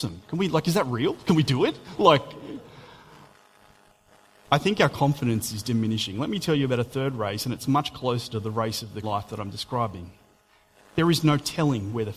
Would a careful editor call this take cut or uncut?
cut